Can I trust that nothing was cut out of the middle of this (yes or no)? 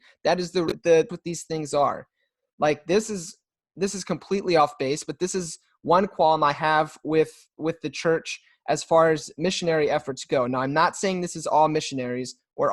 no